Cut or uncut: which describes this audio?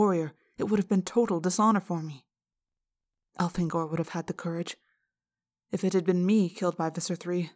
uncut